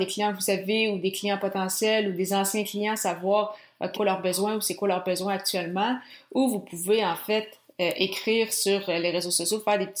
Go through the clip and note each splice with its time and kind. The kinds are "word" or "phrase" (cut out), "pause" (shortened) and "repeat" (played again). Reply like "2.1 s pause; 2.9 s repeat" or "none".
3.9 s word